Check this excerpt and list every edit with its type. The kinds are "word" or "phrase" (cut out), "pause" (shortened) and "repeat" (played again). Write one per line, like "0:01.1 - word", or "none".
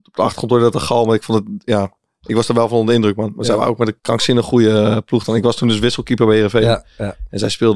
0:04.0 - pause